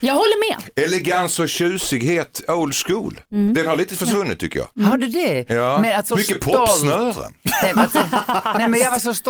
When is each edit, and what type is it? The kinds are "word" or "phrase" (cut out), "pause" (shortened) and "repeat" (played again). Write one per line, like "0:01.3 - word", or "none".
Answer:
0:03.2 - pause
0:04.7 - pause
0:06.1 - word